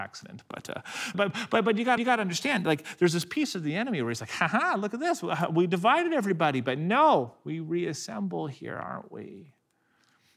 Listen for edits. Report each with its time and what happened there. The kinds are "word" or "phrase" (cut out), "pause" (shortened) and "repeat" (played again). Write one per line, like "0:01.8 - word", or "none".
0:01.1 - word
0:02.0 - repeat